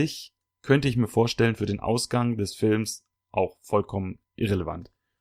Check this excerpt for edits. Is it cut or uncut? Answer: uncut